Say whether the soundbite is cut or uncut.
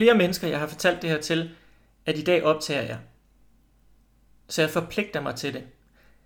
uncut